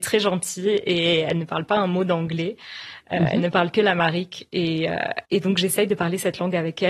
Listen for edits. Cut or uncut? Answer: cut